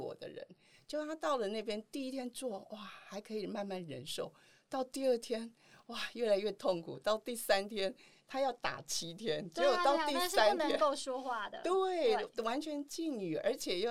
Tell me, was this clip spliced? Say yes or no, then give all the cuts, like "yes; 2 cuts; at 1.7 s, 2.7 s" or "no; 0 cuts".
no; 0 cuts